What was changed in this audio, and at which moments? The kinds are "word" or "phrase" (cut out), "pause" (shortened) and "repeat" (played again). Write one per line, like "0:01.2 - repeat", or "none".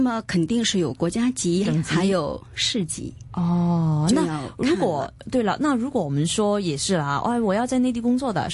0:01.7 - phrase